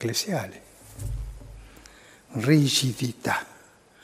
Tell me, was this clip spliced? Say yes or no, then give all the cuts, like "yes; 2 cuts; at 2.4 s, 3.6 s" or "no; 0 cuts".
no; 0 cuts